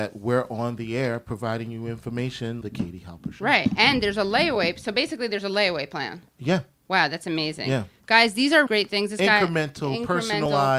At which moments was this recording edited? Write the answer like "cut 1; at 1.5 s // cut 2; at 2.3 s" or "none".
cut 1; at 2.6 s // cut 2; at 6.3 s // cut 3; at 8.7 s